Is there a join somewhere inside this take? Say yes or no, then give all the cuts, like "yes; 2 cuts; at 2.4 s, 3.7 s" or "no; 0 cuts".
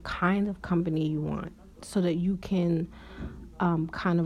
no; 0 cuts